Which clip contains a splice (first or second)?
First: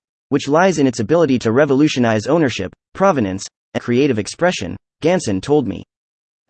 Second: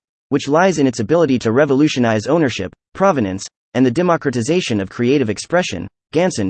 first